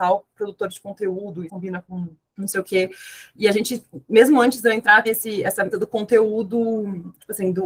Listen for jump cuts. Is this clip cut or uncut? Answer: cut